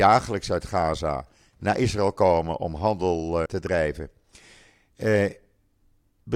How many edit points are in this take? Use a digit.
1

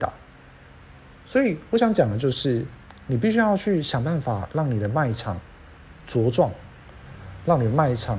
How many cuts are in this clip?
1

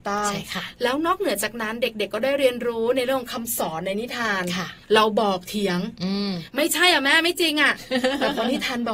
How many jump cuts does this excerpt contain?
1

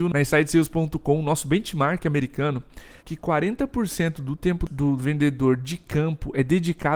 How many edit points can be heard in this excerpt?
1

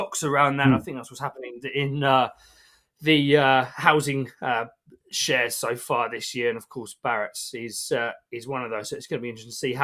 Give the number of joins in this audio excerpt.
0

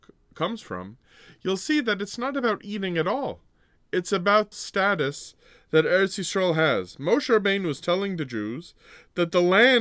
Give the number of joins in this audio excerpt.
1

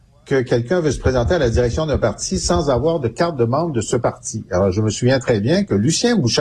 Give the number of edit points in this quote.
0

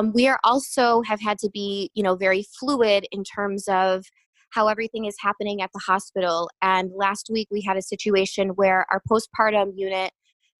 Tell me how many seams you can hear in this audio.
0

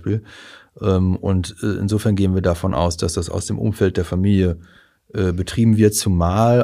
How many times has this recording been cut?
0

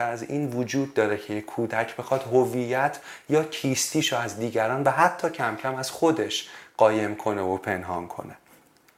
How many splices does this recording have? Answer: 0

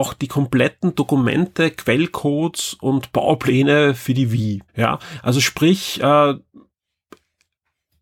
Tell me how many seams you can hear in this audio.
1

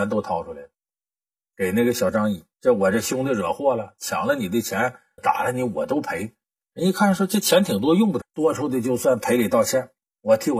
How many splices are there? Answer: 3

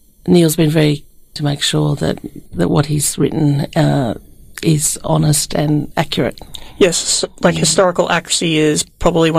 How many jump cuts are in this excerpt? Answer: 2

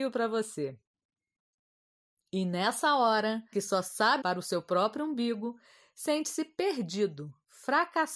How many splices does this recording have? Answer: 2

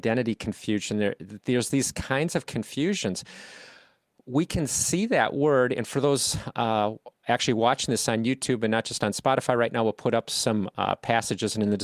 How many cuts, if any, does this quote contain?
0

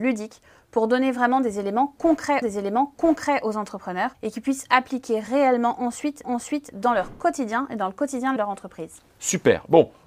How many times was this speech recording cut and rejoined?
4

